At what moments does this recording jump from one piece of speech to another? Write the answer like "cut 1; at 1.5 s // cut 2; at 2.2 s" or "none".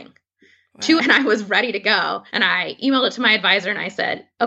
cut 1; at 1.0 s // cut 2; at 2.3 s

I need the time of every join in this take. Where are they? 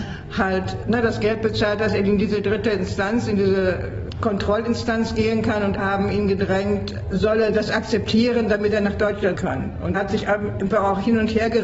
cut 1; at 5.8 s // cut 2; at 7.1 s // cut 3; at 9.4 s // cut 4; at 9.9 s

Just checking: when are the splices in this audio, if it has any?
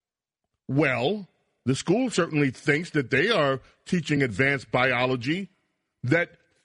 none

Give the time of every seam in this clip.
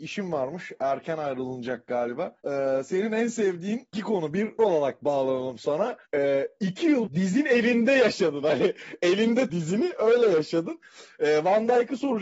cut 1; at 2.4 s // cut 2; at 3.9 s // cut 3; at 4.6 s // cut 4; at 6.1 s // cut 5; at 7.1 s // cut 6; at 9.5 s

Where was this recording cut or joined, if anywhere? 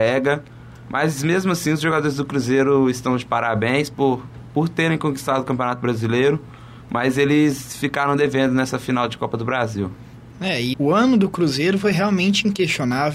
cut 1; at 10.7 s

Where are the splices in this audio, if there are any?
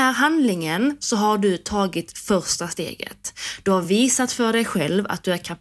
none

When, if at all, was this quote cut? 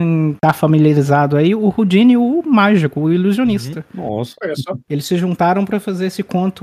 none

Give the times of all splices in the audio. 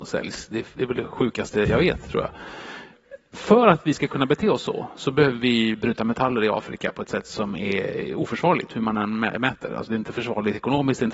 none

